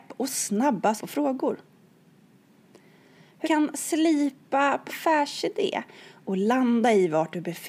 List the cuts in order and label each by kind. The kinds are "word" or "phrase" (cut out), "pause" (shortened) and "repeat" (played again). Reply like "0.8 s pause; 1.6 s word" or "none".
1.0 s word; 3.4 s word; 4.9 s word